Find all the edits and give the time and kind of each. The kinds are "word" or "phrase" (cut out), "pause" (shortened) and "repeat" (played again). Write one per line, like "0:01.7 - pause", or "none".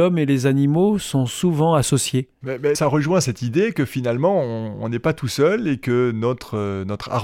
0:02.7 - word